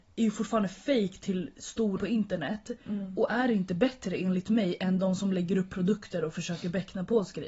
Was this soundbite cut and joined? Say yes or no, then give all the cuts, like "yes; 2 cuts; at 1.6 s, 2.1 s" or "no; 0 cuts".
yes; 1 cut; at 2.0 s